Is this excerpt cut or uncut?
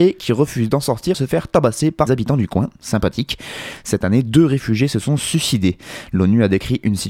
cut